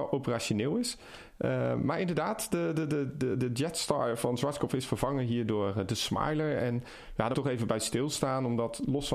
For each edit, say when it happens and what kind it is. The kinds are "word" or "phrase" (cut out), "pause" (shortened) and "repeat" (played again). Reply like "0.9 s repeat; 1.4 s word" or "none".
7.3 s word